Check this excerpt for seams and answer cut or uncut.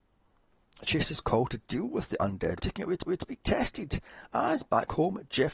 cut